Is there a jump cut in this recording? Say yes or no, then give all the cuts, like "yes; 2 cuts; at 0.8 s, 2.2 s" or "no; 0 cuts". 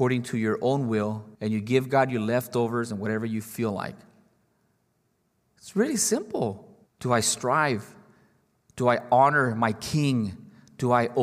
yes; 2 cuts; at 1.3 s, 6.9 s